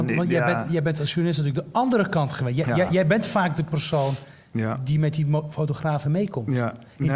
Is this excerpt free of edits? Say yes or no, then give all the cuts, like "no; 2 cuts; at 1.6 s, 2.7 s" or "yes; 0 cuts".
yes; 0 cuts